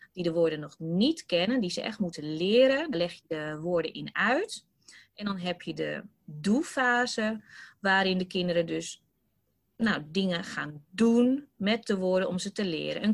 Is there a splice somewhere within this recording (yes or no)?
no